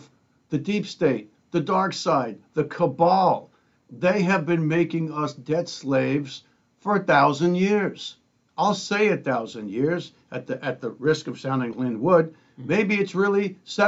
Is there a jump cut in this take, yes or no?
yes